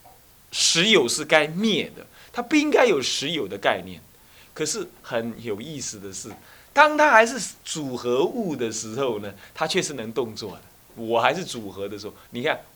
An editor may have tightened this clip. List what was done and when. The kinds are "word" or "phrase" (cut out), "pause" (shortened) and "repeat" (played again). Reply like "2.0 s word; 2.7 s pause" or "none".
10.7 s pause